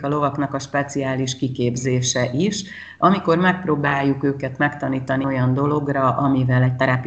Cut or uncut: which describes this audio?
cut